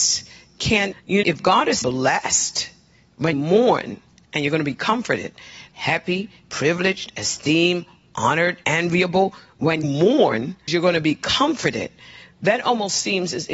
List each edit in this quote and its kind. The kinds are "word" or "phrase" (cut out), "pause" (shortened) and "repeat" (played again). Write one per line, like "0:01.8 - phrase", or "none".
0:00.9 - word
0:01.2 - word
0:01.8 - word
0:03.3 - word
0:05.7 - word
0:06.4 - word
0:08.6 - word
0:09.8 - word
0:10.7 - word

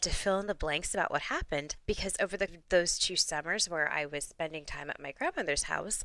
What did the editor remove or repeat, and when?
0:02.5 - word

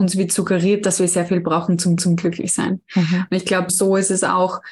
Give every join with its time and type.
0:02.0 - repeat
0:03.7 - word

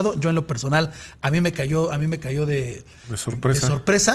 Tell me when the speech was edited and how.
none

